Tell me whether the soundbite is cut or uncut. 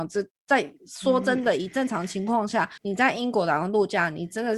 cut